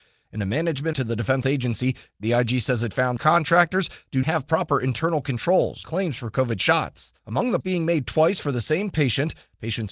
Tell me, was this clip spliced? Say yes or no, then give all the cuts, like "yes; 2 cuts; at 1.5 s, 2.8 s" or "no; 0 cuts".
yes; 7 cuts; at 0.9 s, 1.4 s, 3.2 s, 4.2 s, 5.8 s, 7.2 s, 7.6 s